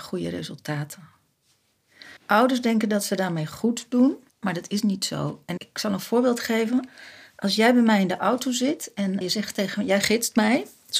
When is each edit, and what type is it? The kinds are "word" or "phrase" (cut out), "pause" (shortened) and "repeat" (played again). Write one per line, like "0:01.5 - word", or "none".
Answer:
0:02.2 - pause
0:04.3 - pause
0:05.6 - word
0:09.2 - word